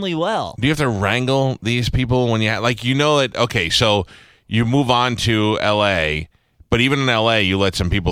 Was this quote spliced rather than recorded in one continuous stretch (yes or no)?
no